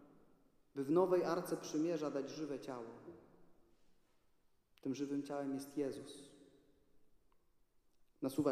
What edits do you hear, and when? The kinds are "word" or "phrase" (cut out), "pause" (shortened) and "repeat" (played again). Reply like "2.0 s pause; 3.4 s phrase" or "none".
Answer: none